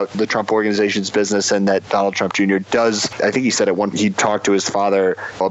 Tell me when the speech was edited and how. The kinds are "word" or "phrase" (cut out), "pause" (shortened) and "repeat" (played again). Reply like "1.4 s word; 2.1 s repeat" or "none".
3.9 s word